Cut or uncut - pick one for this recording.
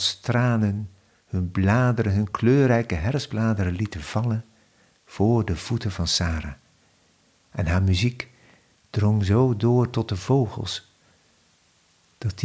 uncut